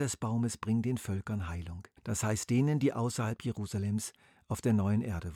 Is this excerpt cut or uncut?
cut